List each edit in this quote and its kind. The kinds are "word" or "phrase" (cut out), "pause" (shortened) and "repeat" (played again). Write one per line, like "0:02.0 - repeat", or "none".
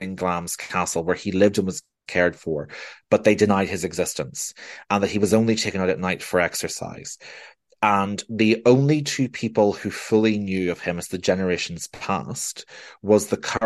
none